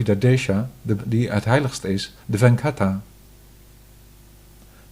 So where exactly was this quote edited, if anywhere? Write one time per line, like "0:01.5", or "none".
0:01.0
0:02.2